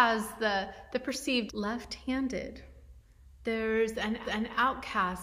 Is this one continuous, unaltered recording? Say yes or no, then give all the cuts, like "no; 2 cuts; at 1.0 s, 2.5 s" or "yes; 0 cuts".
no; 2 cuts; at 1.5 s, 4.2 s